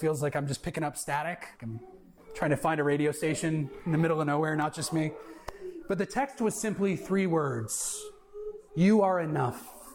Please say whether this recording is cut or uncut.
cut